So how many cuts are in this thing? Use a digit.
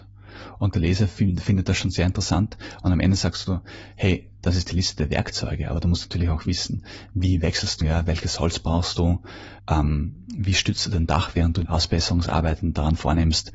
3